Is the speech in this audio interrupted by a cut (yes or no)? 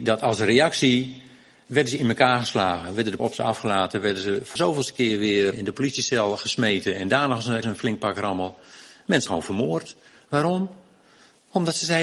yes